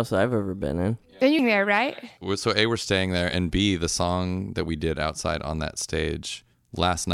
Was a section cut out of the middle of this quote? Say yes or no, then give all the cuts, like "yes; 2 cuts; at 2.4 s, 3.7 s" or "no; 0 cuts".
yes; 1 cut; at 1.4 s